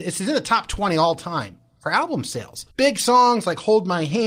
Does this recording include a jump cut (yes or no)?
yes